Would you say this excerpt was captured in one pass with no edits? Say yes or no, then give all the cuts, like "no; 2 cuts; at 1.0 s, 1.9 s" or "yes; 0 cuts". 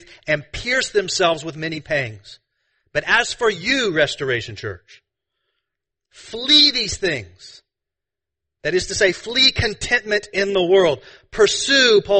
yes; 0 cuts